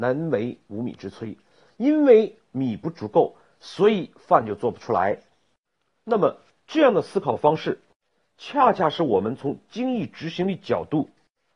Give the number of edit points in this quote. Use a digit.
0